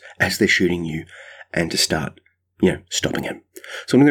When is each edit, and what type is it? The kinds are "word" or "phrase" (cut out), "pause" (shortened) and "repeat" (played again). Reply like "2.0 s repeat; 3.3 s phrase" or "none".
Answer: none